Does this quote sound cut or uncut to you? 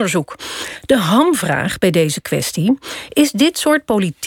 uncut